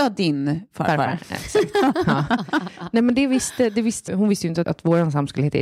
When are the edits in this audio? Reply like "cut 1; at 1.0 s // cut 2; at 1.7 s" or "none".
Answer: cut 1; at 4.1 s // cut 2; at 4.6 s

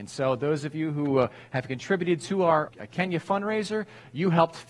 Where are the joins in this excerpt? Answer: cut 1; at 2.7 s

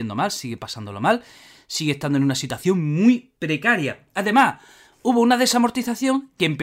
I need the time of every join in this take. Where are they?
none

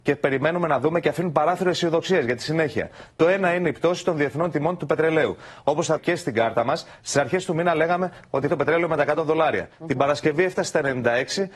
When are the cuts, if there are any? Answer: cut 1; at 6.0 s // cut 2; at 8.5 s

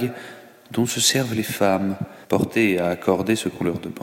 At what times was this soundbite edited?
cut 1; at 2.2 s

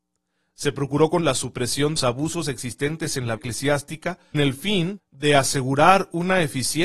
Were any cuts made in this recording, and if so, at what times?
cut 1; at 1.2 s // cut 2; at 2.0 s // cut 3; at 3.4 s // cut 4; at 4.3 s // cut 5; at 5.0 s

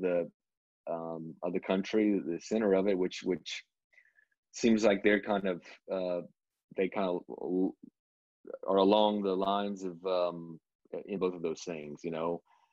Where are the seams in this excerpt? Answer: cut 1; at 11.2 s

